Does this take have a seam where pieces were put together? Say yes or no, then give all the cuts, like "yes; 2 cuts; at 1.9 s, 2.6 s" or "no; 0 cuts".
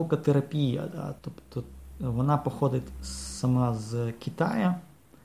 yes; 1 cut; at 1.2 s